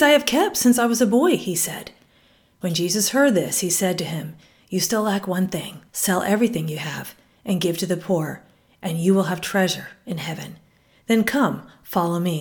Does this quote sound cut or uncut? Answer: cut